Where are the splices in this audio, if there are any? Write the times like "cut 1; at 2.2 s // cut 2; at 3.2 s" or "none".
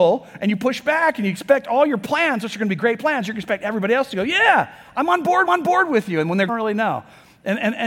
cut 1; at 5.5 s // cut 2; at 6.5 s